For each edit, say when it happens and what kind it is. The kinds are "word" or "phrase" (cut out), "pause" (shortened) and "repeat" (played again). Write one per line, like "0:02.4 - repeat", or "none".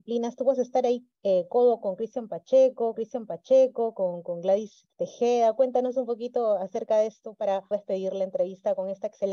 0:01.1 - pause
0:01.8 - word
0:02.9 - repeat
0:04.9 - pause
0:07.7 - word